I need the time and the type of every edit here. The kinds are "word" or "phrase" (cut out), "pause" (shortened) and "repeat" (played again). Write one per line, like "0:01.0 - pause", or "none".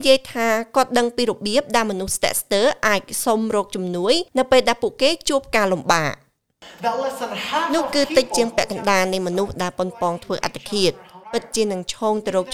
0:04.3 - pause
0:11.2 - pause